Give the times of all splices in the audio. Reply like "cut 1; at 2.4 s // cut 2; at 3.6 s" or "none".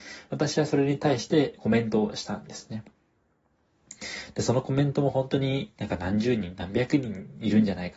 cut 1; at 1.6 s